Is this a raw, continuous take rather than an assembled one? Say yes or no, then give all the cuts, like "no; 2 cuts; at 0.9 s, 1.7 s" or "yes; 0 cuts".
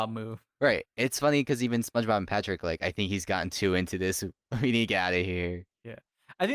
yes; 0 cuts